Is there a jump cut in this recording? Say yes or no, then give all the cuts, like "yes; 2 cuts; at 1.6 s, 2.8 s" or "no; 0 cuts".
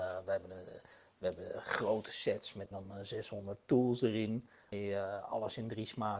yes; 2 cuts; at 2.7 s, 4.7 s